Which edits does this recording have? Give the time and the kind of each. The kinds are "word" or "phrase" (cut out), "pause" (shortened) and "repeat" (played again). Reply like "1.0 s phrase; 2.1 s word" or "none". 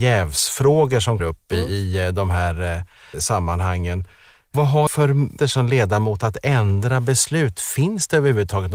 1.2 s word; 3.1 s word; 4.9 s word; 5.4 s word